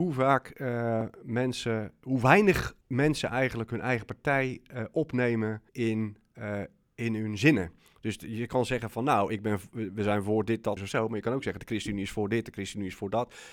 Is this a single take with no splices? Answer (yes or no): no